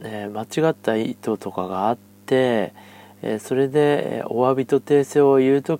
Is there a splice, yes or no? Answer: no